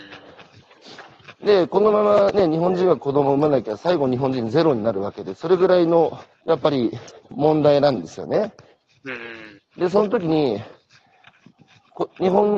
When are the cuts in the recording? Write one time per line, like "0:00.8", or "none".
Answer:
0:06.3
0:07.2
0:09.6